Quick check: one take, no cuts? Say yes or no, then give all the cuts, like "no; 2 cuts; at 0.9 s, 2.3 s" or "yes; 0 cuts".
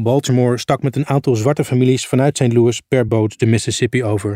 yes; 0 cuts